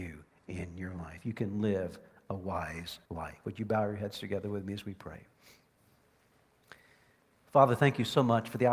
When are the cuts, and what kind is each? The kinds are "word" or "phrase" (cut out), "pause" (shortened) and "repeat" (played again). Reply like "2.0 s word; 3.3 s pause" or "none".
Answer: 3.0 s pause